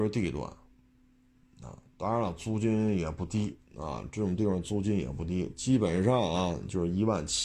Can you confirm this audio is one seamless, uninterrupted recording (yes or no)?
no